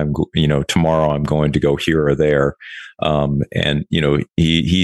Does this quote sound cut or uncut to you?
uncut